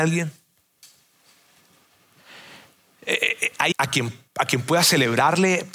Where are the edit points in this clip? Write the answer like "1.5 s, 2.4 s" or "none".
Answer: 3.7 s, 4.3 s